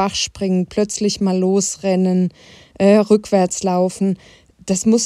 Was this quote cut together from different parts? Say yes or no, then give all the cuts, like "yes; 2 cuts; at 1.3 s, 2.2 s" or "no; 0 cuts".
no; 0 cuts